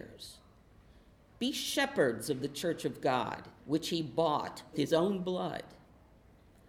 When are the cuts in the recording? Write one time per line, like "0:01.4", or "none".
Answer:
0:03.6
0:04.7